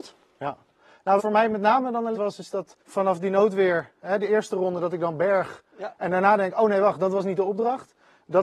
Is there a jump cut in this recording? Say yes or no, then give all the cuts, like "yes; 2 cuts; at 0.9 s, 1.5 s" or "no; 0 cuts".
yes; 4 cuts; at 1.2 s, 2.1 s, 2.8 s, 4.0 s